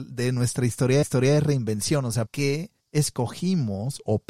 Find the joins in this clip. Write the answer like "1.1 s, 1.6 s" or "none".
1.0 s, 2.3 s, 2.8 s